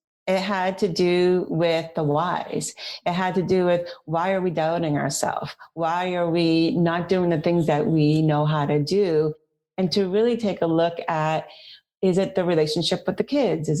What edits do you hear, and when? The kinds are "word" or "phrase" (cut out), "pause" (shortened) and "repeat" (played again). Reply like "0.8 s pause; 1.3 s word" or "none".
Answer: none